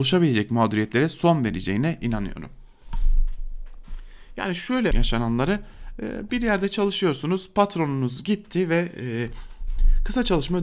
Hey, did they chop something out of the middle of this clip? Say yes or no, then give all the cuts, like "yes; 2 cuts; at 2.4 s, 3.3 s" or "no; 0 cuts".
yes; 1 cut; at 4.9 s